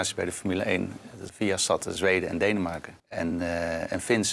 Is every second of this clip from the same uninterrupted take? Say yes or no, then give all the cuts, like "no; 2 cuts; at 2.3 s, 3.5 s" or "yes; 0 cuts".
no; 3 cuts; at 1.3 s, 2.0 s, 3.0 s